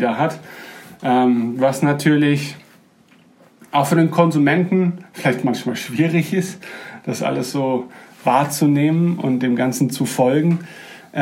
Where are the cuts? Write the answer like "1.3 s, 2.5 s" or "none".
none